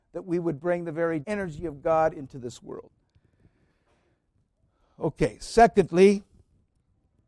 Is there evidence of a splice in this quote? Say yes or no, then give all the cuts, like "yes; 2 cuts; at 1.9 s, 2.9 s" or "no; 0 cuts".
yes; 1 cut; at 1.2 s